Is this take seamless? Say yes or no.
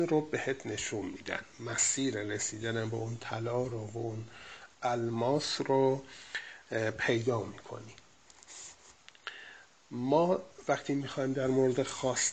yes